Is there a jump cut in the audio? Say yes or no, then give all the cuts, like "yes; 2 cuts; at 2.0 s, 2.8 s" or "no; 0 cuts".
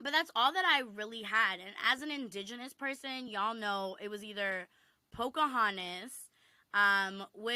no; 0 cuts